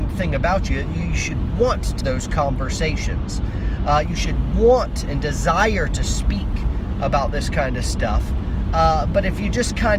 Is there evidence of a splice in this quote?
yes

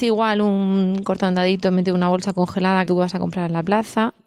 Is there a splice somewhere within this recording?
yes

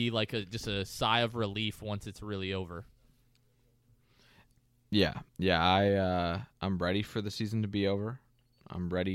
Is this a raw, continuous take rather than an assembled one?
no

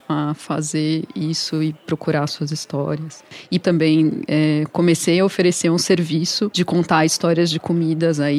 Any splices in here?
yes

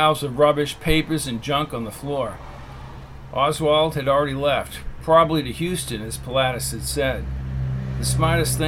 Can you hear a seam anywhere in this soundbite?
no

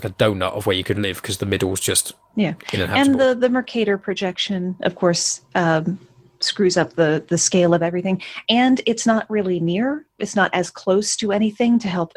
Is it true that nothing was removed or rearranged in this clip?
yes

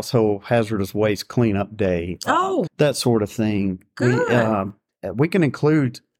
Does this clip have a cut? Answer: yes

